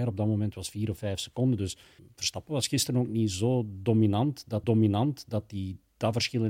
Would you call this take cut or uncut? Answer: cut